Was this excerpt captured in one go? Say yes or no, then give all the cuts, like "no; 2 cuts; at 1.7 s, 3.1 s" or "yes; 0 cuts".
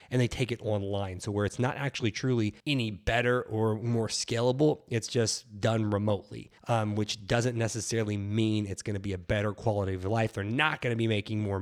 no; 2 cuts; at 2.6 s, 6.6 s